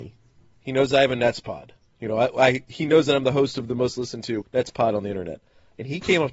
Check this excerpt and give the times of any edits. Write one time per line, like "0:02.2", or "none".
0:04.5